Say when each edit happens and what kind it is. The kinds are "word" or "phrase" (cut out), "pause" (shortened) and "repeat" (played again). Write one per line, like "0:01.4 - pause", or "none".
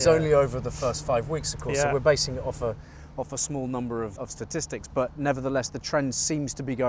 0:04.2 - word